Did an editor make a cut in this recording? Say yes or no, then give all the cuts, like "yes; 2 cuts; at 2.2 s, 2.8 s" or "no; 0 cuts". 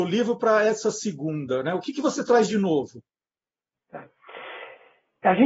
no; 0 cuts